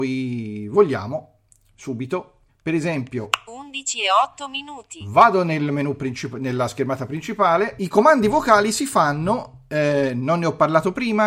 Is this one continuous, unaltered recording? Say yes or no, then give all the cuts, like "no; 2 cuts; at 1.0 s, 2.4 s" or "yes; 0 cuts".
no; 1 cut; at 2.5 s